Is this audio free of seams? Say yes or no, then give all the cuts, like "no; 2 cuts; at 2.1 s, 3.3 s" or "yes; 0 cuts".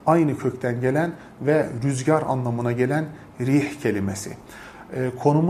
yes; 0 cuts